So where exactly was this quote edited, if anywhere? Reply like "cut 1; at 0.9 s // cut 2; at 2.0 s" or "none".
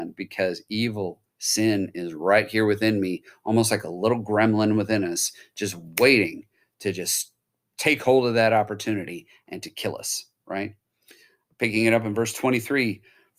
none